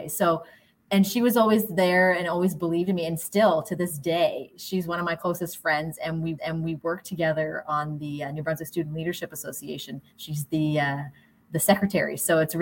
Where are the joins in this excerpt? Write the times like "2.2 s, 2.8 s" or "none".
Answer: 6.4 s, 10.1 s